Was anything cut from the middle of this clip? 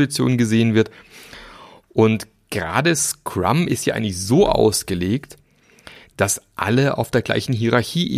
no; 0 cuts

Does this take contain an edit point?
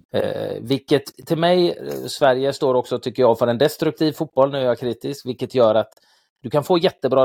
no; 0 cuts

